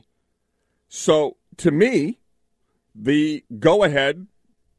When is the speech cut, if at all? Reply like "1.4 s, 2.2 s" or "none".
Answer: none